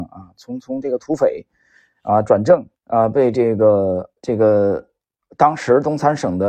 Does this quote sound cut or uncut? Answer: cut